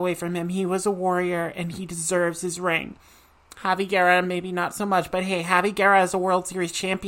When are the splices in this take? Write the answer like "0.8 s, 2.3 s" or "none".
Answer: none